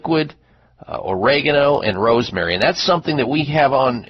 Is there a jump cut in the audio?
no; 0 cuts

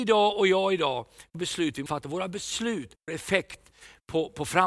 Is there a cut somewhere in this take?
yes; 3 cuts; at 1.3 s, 1.9 s, 3.1 s

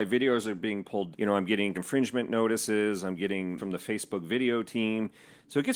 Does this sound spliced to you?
yes; 3 cuts; at 1.1 s, 1.7 s, 3.6 s

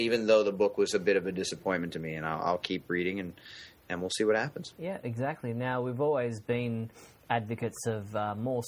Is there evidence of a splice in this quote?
no; 0 cuts

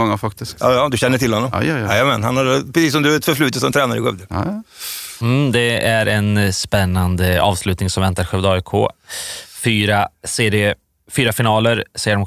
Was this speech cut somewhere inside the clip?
no; 0 cuts

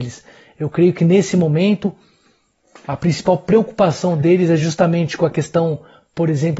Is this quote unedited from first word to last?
yes; 0 cuts

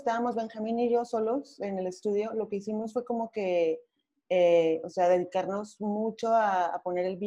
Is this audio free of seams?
yes; 0 cuts

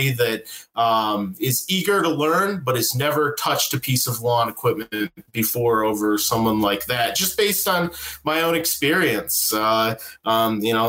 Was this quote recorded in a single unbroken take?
no; 1 cut; at 5.2 s

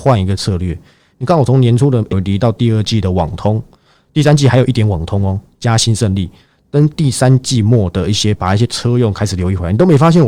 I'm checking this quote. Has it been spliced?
yes; 1 cut; at 2.1 s

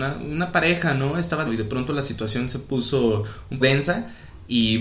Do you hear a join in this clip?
yes; 2 cuts; at 1.5 s, 3.6 s

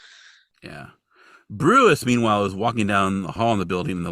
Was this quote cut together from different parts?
no; 0 cuts

